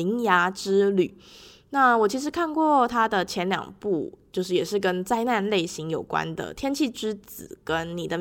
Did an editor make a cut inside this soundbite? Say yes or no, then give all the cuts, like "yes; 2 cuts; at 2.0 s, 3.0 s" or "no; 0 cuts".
no; 0 cuts